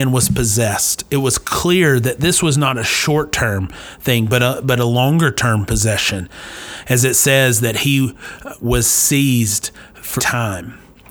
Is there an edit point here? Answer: yes; 1 cut; at 10.2 s

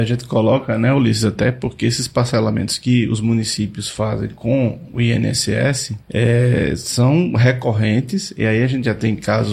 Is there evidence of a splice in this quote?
yes; 1 cut; at 6.0 s

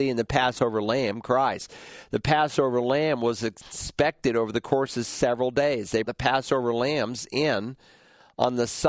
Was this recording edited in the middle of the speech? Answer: yes; 1 cut; at 6.0 s

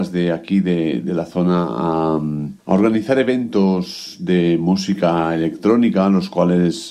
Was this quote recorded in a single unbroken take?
yes; 0 cuts

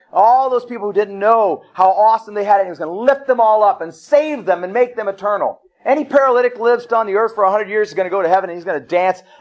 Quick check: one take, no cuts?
no; 1 cut; at 6.9 s

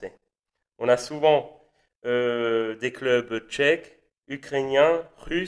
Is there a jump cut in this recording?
no; 0 cuts

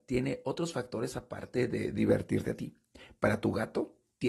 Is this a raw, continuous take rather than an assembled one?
yes; 0 cuts

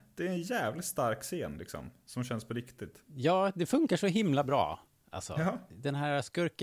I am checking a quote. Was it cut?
no; 0 cuts

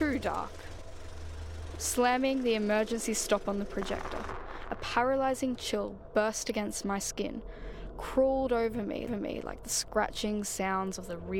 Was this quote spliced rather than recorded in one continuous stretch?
yes; 1 cut; at 9.1 s

